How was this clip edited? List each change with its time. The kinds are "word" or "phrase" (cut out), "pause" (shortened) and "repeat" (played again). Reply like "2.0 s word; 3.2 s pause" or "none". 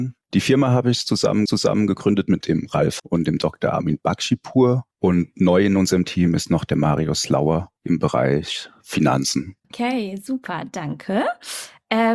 1.5 s repeat; 2.4 s phrase; 3.0 s word; 4.9 s pause; 7.8 s pause; 9.6 s pause